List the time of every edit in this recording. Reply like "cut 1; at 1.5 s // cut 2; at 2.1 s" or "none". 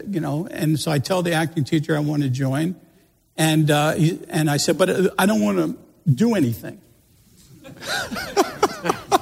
none